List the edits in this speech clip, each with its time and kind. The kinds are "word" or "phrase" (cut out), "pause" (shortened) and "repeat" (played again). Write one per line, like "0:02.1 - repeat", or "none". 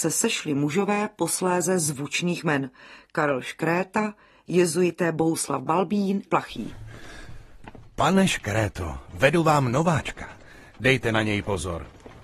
0:06.3 - phrase